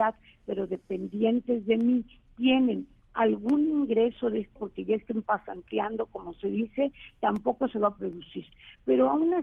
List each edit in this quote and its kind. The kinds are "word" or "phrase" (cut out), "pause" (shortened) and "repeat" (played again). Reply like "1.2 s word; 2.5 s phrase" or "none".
4.6 s word; 8.0 s word